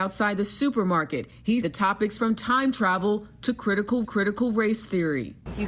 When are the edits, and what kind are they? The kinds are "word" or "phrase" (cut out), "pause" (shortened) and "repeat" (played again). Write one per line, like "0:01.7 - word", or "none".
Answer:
0:01.6 - word
0:02.2 - word
0:04.0 - repeat